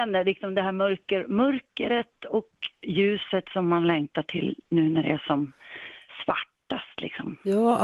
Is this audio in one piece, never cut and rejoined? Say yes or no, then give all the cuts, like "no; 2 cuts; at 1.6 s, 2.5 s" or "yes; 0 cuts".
no; 1 cut; at 4.6 s